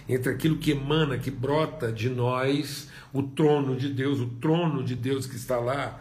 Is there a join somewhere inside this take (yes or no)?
no